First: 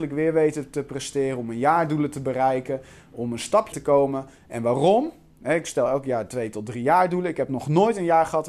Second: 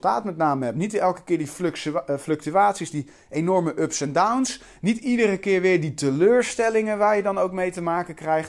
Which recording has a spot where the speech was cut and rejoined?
first; 1 cut; at 3.7 s

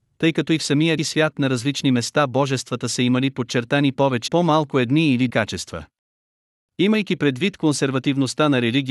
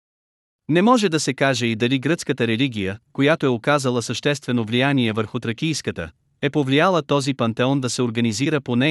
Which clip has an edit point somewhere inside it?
first; 3 cuts; at 1.0 s, 4.3 s, 5.3 s

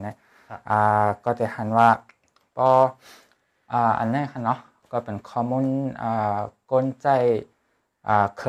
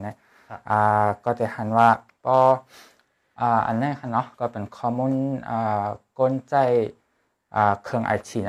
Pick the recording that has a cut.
second; 2 cuts; at 2.1 s, 4.3 s

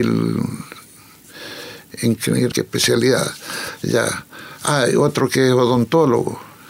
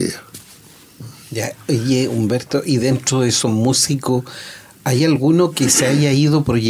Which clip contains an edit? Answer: first; 1 cut; at 2.5 s

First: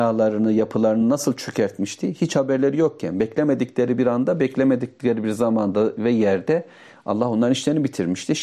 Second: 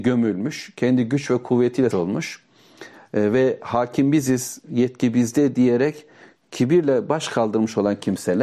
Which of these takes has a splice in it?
second; 1 cut; at 1.9 s

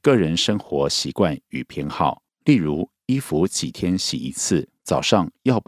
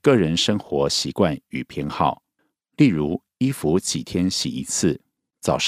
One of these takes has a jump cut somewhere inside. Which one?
first; 2 cuts; at 2.3 s, 4.8 s

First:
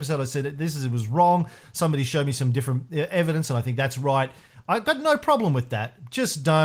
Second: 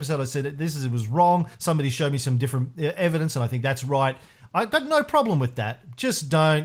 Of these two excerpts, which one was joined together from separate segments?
second; 1 cut; at 1.5 s

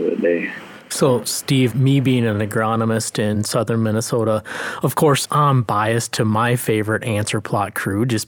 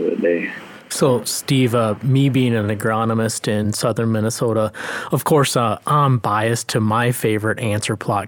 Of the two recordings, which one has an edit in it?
first; 2 cuts; at 1.7 s, 5.2 s

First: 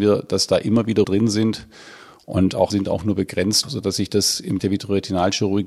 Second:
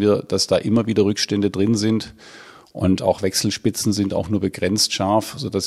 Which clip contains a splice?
first; 4 cuts; at 1.0 s, 2.7 s, 3.6 s, 4.6 s

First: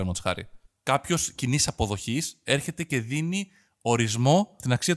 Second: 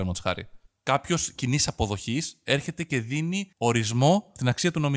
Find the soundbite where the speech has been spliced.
second; 1 cut; at 3.5 s

